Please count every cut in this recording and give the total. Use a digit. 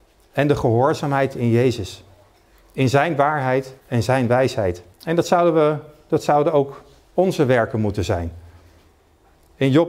3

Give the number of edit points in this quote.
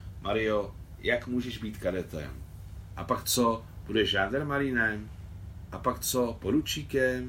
0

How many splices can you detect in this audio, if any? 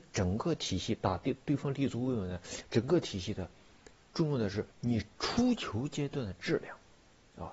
2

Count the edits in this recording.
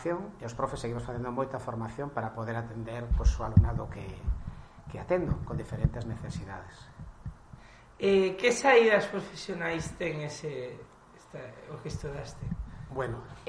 0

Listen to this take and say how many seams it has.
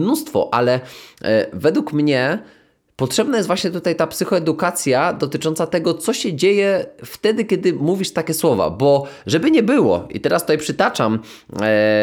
0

